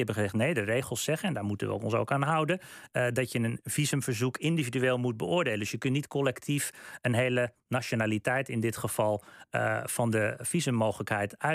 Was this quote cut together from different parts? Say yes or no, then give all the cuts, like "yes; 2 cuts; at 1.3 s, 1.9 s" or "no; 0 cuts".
no; 0 cuts